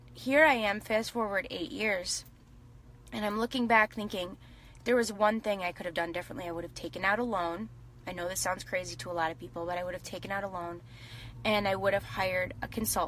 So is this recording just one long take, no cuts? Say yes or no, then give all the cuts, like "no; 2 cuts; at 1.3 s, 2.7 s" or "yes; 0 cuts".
yes; 0 cuts